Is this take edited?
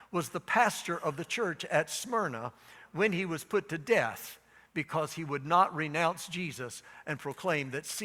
no; 0 cuts

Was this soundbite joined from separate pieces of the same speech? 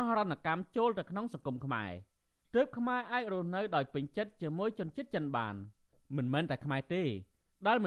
no; 0 cuts

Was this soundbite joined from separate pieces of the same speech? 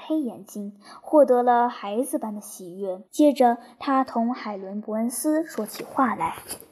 yes; 1 cut; at 3.1 s

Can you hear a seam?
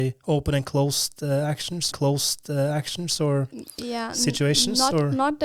yes; 1 cut; at 1.9 s

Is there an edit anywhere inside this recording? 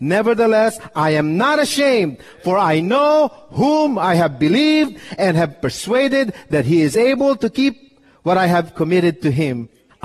no; 0 cuts

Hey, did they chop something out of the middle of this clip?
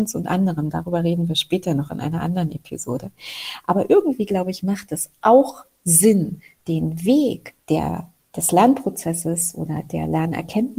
yes; 1 cut; at 7.6 s

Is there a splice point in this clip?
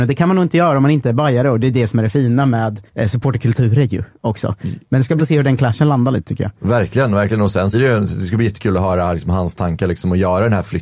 yes; 3 cuts; at 2.9 s, 5.2 s, 7.7 s

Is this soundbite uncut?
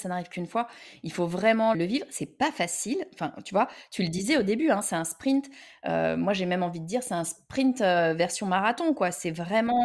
no; 1 cut; at 1.7 s

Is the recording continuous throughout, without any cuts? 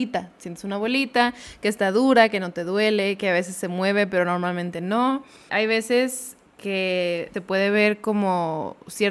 no; 1 cut; at 6.5 s

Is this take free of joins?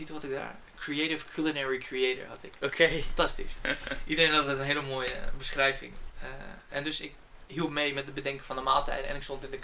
yes; 0 cuts

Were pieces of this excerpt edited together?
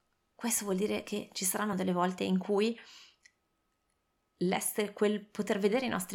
no; 0 cuts

